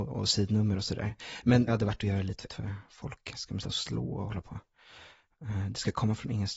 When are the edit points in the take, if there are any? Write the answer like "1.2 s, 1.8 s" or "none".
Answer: 1.7 s, 2.5 s, 3.6 s